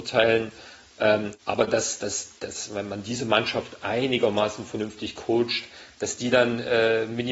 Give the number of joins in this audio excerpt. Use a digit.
2